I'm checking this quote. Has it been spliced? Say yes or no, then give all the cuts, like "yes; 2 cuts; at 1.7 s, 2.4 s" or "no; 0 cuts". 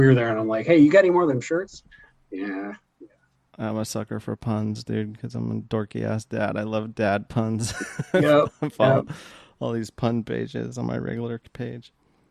no; 0 cuts